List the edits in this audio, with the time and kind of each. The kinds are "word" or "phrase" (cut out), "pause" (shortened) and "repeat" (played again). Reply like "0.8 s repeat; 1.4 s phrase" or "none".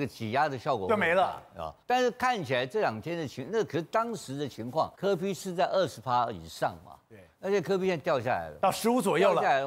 1.8 s pause; 4.9 s pause